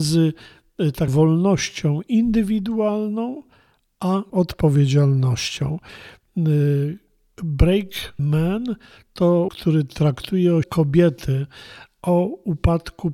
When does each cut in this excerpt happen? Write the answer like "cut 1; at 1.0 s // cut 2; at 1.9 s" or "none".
cut 1; at 1.1 s // cut 2; at 4.3 s // cut 3; at 8.2 s // cut 4; at 9.5 s // cut 5; at 10.6 s

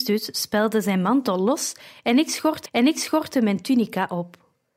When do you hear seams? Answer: cut 1; at 2.7 s

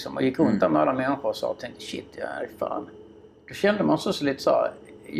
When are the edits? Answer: none

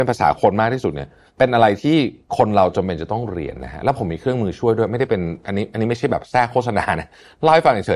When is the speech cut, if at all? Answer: cut 1; at 1.3 s

